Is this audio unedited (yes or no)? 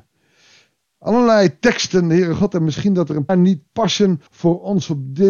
no